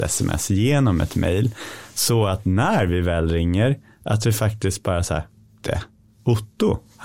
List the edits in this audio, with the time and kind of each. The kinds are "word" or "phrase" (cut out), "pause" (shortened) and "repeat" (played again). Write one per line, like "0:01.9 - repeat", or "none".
0:05.6 - word